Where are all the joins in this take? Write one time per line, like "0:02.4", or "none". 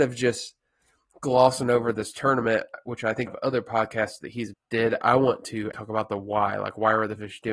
0:03.3
0:04.5
0:05.7